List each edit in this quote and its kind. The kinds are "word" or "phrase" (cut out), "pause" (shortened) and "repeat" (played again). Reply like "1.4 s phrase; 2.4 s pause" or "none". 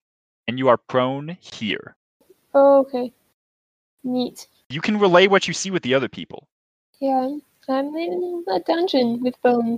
none